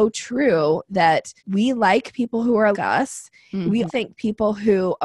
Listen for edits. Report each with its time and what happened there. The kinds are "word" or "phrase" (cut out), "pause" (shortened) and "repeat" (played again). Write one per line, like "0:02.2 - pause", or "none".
0:01.4 - pause
0:02.7 - word
0:03.9 - word